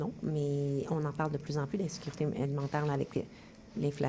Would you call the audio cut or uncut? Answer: uncut